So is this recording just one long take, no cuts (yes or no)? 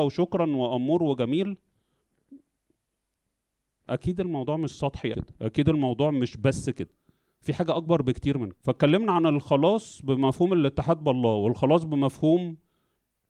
no